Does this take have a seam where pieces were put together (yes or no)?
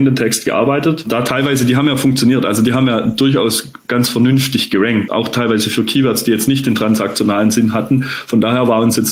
yes